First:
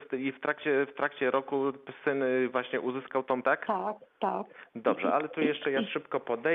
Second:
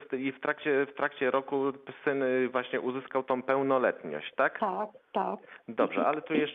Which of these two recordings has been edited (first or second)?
first